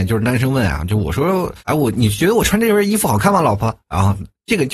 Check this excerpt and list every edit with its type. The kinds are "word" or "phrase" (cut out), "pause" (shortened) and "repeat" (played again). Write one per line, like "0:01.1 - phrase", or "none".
0:01.6 - pause